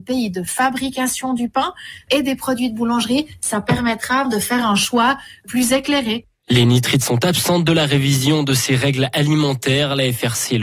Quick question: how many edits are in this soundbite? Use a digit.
1